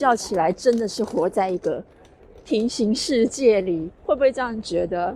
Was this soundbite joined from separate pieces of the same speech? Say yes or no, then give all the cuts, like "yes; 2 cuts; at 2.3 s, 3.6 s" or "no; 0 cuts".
yes; 1 cut; at 4.0 s